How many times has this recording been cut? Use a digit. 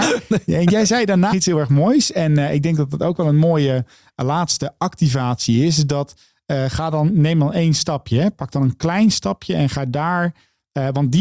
1